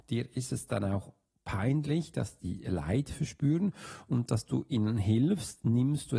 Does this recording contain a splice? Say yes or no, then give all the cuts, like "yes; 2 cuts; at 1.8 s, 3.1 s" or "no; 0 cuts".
no; 0 cuts